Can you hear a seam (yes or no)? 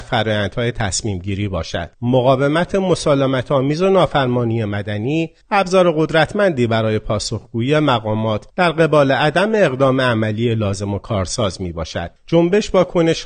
yes